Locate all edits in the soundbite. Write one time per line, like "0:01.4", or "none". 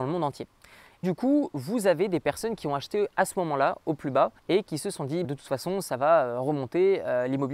0:01.0
0:04.4
0:05.2